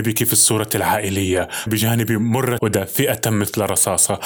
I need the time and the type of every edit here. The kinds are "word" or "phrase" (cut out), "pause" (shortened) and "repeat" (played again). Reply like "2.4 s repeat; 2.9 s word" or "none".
1.7 s word; 2.6 s word